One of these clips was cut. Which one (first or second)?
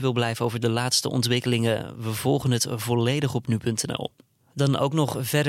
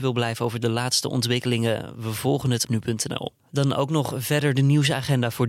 second